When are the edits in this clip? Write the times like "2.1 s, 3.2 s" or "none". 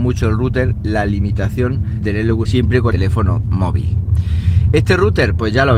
2.0 s, 2.4 s, 2.9 s

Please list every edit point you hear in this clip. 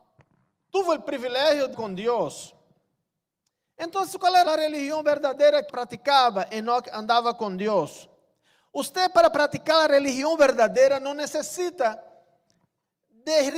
1.7 s, 4.5 s, 5.7 s

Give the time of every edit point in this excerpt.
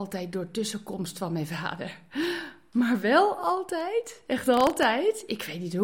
none

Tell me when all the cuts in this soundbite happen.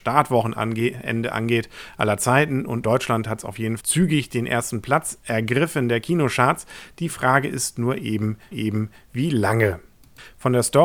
2.8 s, 3.8 s, 8.5 s

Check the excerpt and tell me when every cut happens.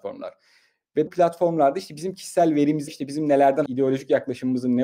1.1 s, 2.9 s, 3.7 s

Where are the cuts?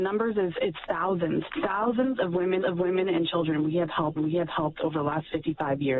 2.6 s, 4.2 s

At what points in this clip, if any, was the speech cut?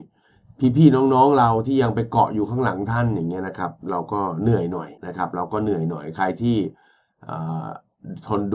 5.0 s

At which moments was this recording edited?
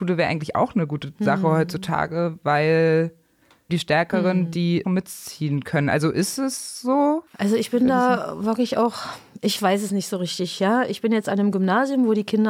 3.7 s, 4.8 s, 7.3 s

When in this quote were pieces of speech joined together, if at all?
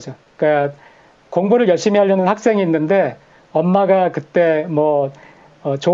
none

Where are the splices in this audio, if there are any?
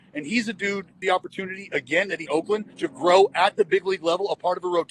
1.0 s, 2.3 s, 2.7 s

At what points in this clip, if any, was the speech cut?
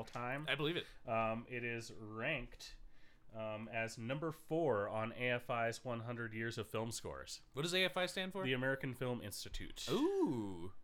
none

